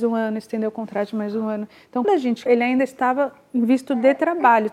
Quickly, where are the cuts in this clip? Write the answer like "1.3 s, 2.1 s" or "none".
2.0 s, 2.5 s